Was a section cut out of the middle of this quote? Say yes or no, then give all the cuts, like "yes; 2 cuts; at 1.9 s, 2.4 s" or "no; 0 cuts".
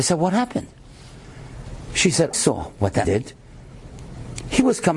yes; 2 cuts; at 2.3 s, 3.0 s